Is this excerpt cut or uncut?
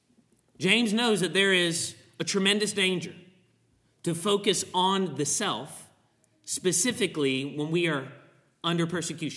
uncut